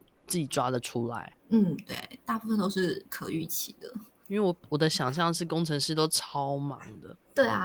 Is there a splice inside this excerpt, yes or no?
yes